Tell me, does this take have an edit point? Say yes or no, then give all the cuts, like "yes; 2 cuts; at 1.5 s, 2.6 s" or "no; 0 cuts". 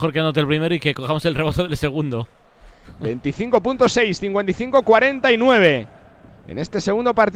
no; 0 cuts